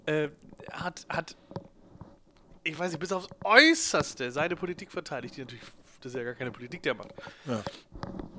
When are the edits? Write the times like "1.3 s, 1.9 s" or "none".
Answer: none